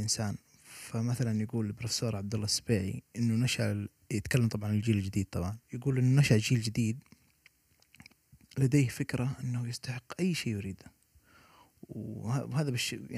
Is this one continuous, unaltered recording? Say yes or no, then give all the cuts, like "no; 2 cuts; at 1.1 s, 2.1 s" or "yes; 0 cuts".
no; 1 cut; at 5.6 s